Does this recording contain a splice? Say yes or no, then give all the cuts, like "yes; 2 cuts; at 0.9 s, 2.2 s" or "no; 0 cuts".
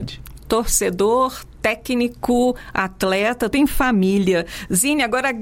yes; 1 cut; at 3.5 s